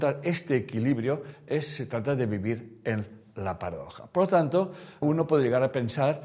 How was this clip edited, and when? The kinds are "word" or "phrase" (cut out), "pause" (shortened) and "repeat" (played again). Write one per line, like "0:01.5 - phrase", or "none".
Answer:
0:05.0 - word